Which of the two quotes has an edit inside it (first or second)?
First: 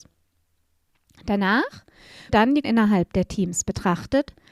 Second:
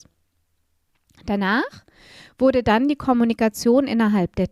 first